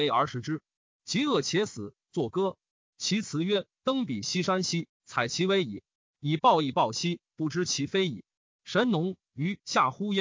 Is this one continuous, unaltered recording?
yes; 0 cuts

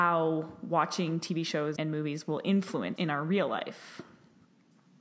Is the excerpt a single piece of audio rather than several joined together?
no; 2 cuts; at 1.8 s, 3.0 s

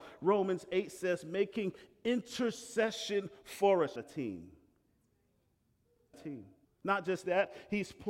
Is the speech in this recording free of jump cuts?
no; 3 cuts; at 4.0 s, 6.1 s, 6.6 s

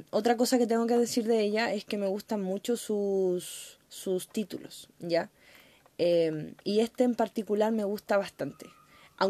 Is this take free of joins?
no; 2 cuts; at 3.8 s, 6.6 s

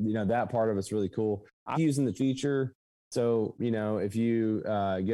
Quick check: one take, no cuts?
no; 3 cuts; at 1.7 s, 2.1 s, 3.6 s

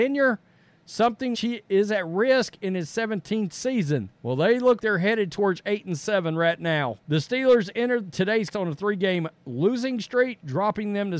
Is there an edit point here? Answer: yes; 5 cuts; at 1.3 s, 4.1 s, 4.8 s, 7.0 s, 8.5 s

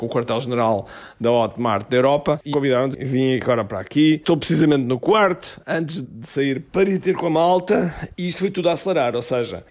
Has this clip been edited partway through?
yes; 2 cuts; at 2.5 s, 6.0 s

